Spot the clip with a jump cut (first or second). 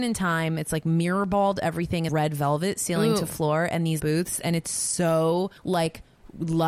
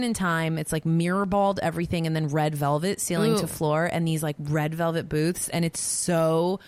first